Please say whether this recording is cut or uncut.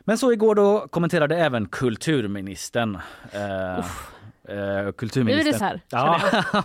cut